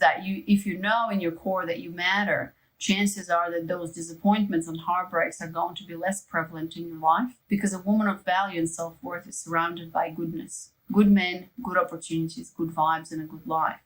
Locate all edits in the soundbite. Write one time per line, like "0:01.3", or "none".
0:07.4
0:10.8